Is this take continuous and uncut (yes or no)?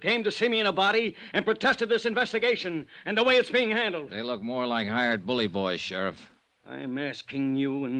yes